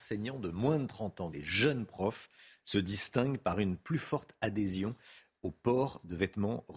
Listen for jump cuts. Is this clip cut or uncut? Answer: cut